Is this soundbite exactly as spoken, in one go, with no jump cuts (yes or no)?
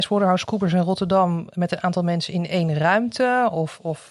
yes